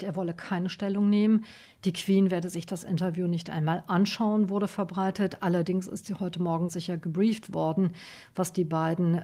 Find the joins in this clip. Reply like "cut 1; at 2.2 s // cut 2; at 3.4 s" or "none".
cut 1; at 6.7 s